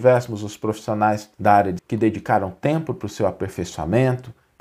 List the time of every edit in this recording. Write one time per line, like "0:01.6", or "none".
0:01.3
0:01.8